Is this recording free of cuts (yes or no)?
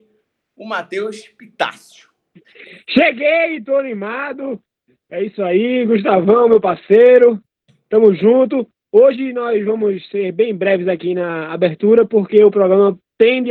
yes